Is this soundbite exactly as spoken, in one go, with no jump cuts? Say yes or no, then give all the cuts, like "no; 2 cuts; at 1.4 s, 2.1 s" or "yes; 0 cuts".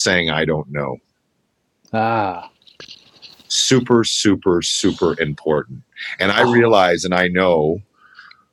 yes; 0 cuts